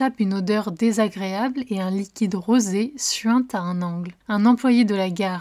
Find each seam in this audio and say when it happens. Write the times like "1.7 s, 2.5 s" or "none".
4.2 s